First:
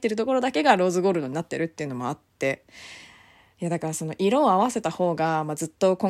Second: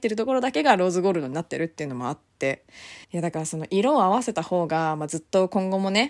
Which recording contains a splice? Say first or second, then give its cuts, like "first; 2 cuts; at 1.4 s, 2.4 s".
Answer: second; 1 cut; at 3.0 s